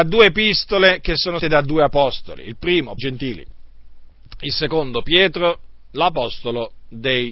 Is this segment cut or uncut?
cut